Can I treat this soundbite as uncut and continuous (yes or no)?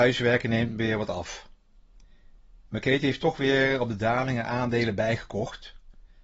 yes